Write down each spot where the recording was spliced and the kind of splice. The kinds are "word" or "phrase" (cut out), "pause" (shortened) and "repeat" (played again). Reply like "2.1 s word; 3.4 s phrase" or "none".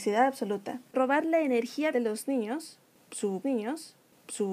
0.9 s word; 1.9 s word; 3.4 s repeat